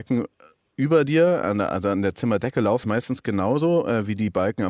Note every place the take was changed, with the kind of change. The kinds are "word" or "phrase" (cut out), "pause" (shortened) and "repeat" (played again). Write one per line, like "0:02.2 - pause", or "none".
0:02.8 - word